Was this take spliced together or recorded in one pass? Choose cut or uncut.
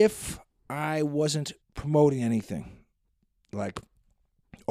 cut